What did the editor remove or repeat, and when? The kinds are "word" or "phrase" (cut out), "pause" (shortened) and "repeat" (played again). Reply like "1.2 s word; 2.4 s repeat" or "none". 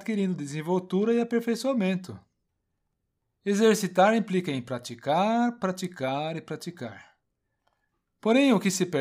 none

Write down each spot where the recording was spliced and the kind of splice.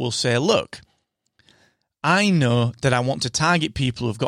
none

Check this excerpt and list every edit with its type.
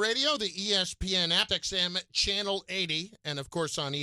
1.5 s word

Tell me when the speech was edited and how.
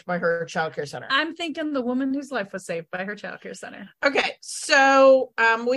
none

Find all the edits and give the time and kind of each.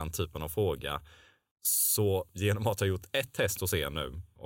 none

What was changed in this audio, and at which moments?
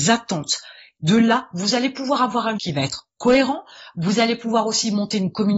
2.6 s word

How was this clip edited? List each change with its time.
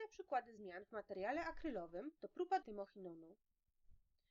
2.2 s pause; 2.6 s word

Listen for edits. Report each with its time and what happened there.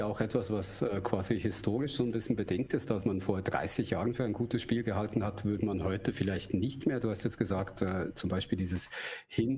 3.0 s word

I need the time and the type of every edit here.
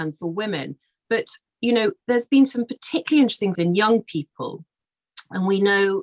2.0 s pause; 3.5 s word

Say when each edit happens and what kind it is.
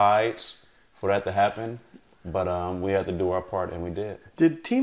none

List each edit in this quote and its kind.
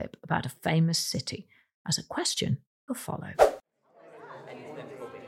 none

